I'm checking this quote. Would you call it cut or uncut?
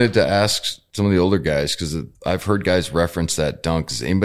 cut